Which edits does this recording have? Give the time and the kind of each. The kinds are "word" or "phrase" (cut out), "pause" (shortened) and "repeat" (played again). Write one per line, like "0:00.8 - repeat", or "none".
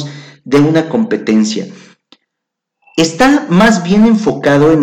none